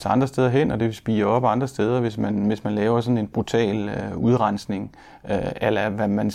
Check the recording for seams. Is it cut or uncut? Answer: uncut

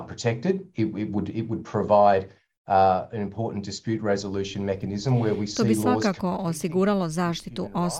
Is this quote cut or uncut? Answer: uncut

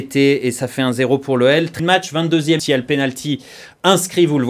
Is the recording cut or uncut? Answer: cut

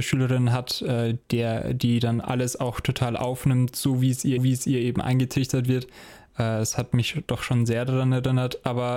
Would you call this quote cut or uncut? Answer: cut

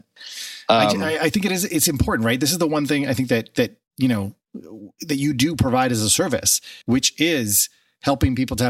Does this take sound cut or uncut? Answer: cut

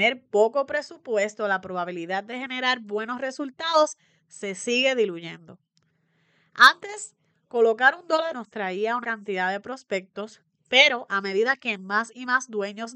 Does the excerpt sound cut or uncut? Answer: cut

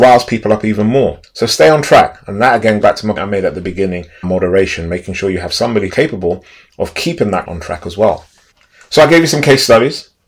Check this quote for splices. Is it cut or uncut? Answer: cut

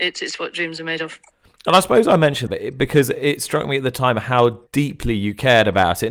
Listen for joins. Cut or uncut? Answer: cut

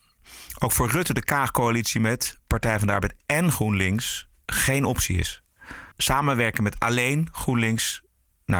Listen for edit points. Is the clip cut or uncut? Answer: cut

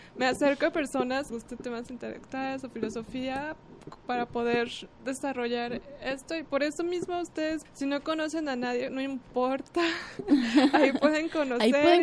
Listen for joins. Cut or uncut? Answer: cut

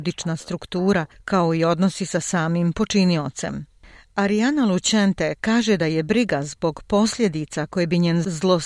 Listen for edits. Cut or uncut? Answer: uncut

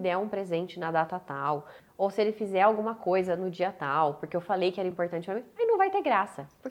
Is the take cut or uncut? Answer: uncut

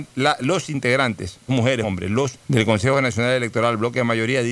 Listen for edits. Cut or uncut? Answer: cut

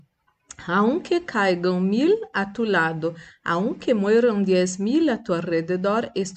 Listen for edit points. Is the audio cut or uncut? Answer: uncut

